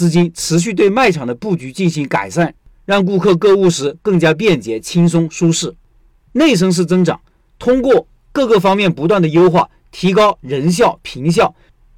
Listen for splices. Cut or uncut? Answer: uncut